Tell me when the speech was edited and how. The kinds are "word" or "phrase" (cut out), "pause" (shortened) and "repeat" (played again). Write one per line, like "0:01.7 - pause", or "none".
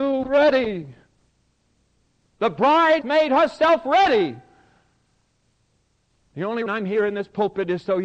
0:03.0 - word
0:06.7 - word